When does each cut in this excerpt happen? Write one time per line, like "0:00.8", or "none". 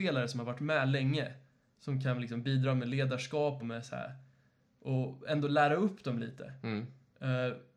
0:03.6